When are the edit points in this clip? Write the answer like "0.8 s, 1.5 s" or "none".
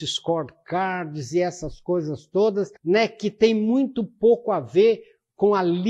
2.8 s